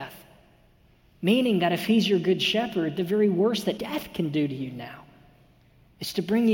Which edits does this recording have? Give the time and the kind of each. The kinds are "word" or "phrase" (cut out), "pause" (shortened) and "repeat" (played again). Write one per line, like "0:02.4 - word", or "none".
0:03.8 - word